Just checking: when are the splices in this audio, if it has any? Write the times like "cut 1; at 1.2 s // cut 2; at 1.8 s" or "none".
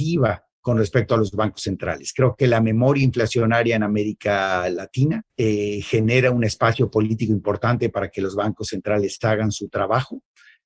cut 1; at 5.3 s